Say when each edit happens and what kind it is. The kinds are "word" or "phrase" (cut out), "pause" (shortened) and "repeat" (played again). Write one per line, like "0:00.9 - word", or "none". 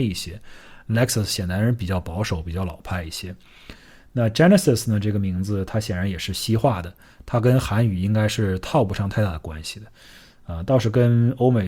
none